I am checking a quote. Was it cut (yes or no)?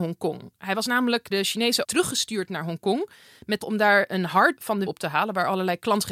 yes